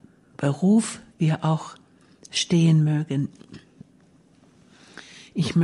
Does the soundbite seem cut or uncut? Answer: uncut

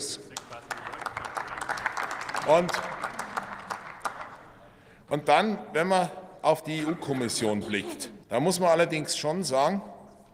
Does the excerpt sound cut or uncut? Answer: cut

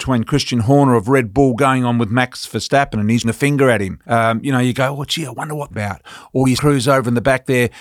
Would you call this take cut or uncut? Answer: cut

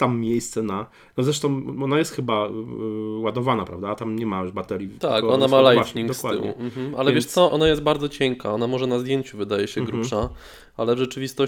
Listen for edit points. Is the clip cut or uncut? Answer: cut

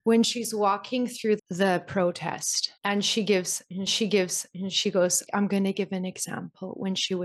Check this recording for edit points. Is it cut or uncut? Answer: cut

